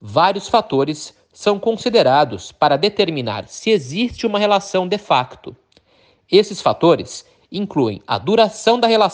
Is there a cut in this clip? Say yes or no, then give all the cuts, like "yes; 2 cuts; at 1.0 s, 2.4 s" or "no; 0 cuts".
no; 0 cuts